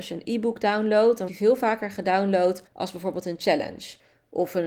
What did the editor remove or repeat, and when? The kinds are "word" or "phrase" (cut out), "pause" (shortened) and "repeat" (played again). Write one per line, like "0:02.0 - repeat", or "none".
0:01.3 - word
0:02.7 - pause